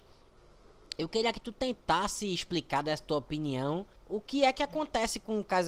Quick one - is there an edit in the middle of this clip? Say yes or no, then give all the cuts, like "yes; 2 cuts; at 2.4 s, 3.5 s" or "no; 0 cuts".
yes; 1 cut; at 4.0 s